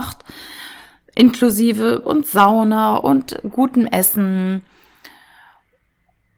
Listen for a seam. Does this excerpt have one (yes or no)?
yes